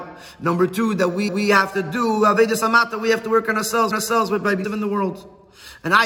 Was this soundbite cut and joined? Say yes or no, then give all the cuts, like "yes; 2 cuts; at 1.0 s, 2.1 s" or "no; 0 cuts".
yes; 3 cuts; at 1.3 s, 3.9 s, 4.6 s